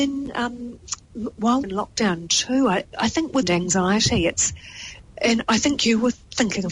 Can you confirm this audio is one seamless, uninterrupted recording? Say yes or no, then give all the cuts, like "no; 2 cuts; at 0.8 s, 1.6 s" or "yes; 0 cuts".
no; 3 cuts; at 1.6 s, 2.9 s, 3.4 s